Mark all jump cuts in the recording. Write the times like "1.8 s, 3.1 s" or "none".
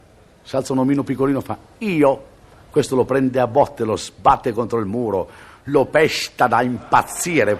none